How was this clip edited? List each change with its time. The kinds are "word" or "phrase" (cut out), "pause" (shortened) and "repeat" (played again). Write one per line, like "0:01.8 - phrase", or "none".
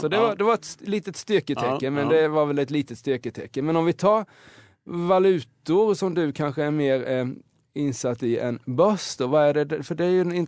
none